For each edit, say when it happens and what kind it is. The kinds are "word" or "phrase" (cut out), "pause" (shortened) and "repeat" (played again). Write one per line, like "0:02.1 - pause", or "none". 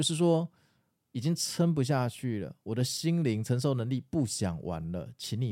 none